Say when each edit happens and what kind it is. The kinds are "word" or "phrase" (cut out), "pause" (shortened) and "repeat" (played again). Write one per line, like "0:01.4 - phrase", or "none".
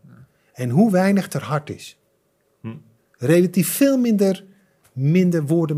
none